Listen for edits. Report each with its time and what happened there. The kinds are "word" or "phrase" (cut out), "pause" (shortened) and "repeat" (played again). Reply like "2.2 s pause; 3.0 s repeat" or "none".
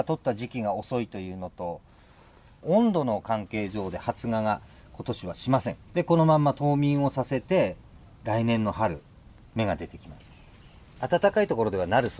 5.8 s pause